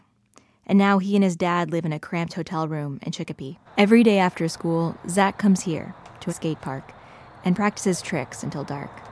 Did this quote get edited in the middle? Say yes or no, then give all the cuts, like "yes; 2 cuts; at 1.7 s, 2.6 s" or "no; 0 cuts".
yes; 2 cuts; at 3.7 s, 6.3 s